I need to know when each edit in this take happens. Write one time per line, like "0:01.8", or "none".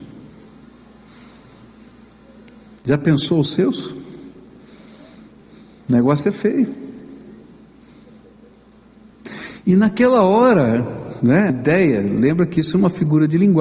0:11.5